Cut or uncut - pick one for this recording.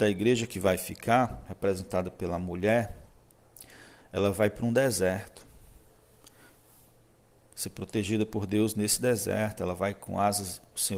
uncut